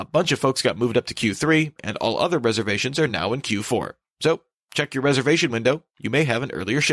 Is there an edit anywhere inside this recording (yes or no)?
no